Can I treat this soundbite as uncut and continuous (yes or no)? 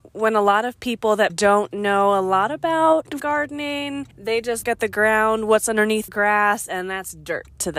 no